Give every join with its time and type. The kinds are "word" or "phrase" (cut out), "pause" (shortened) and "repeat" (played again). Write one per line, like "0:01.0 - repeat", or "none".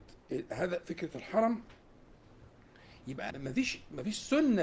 0:03.3 - word